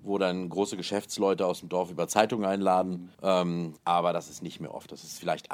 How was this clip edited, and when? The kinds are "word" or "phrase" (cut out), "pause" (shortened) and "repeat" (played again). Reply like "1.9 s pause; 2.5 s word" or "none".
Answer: 3.1 s pause; 3.8 s pause